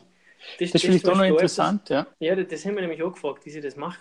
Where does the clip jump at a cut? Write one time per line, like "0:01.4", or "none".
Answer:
0:02.1